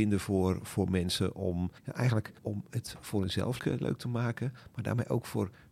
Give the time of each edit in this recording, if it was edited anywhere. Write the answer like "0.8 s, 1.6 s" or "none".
1.8 s, 2.4 s, 3.6 s

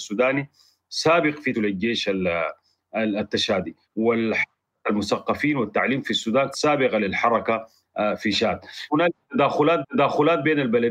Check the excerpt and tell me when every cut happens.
1.5 s, 3.8 s, 6.5 s, 8.9 s, 9.8 s

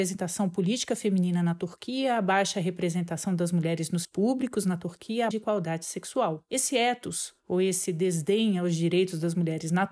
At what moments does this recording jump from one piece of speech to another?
4.0 s, 5.3 s

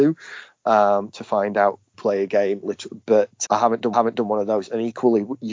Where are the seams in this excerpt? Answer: 1.9 s, 3.4 s, 3.9 s

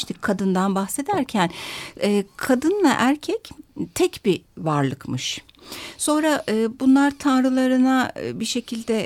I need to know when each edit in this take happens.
none

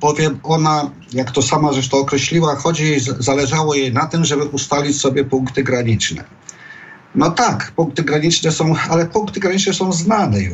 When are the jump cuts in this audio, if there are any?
none

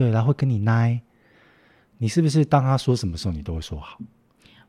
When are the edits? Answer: none

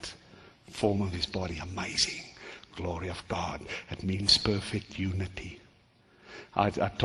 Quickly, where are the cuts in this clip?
none

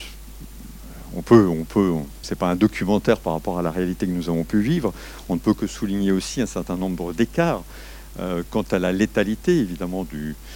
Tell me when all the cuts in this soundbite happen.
2.2 s

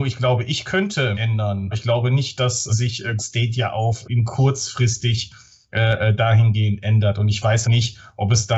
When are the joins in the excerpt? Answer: 1.1 s, 1.7 s, 2.7 s, 3.2 s, 4.0 s, 7.6 s

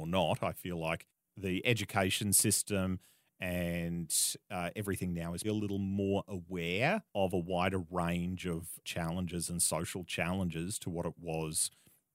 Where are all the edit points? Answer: 5.4 s, 7.1 s, 8.8 s

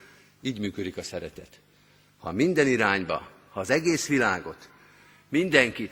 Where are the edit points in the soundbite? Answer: none

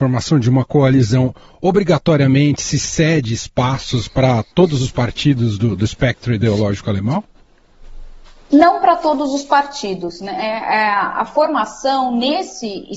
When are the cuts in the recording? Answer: none

